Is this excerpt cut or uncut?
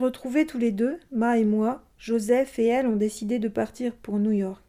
cut